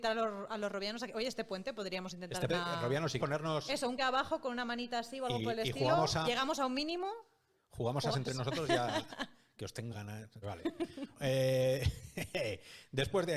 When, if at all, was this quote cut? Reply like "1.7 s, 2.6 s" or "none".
2.5 s, 3.2 s, 4.0 s, 6.2 s, 8.1 s, 9.9 s, 10.4 s, 11.1 s